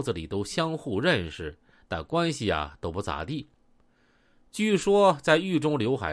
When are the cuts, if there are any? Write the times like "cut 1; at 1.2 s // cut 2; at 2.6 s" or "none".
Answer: none